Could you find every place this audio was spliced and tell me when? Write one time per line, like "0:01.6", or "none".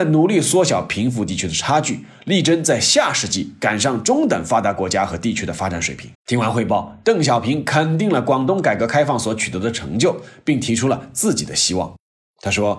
0:06.1